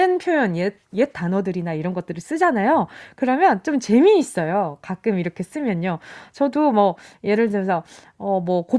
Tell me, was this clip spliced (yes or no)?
no